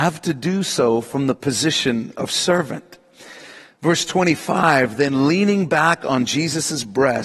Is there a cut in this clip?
no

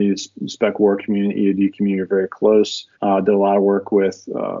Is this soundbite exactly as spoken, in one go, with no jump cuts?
no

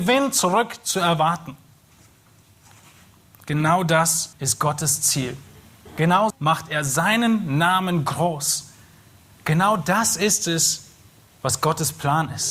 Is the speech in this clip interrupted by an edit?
yes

